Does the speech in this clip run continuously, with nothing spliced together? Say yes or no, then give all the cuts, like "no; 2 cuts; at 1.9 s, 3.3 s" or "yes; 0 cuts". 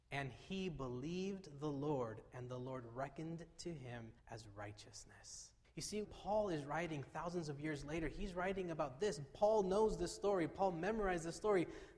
no; 3 cuts; at 4.2 s, 5.6 s, 6.0 s